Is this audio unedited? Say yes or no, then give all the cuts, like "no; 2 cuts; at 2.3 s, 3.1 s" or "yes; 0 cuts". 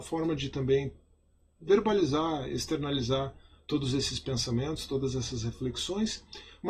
yes; 0 cuts